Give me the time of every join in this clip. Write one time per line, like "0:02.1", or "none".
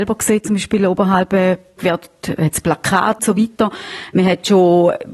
0:01.8
0:03.2